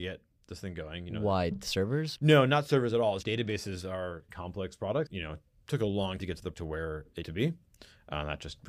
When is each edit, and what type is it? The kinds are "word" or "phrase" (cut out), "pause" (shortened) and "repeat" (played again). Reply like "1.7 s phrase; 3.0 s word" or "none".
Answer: 2.2 s word; 3.2 s word; 4.3 s word; 5.1 s word; 6.2 s word; 6.5 s word; 7.2 s word